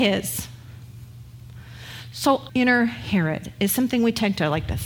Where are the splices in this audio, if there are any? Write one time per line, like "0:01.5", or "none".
0:02.5